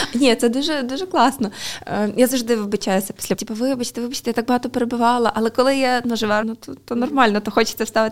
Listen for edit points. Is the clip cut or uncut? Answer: cut